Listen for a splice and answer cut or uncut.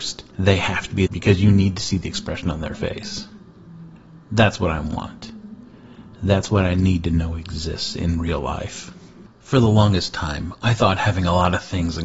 cut